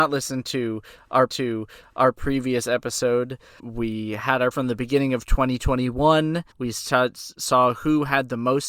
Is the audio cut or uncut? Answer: cut